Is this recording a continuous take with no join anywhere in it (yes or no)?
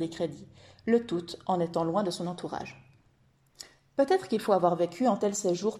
yes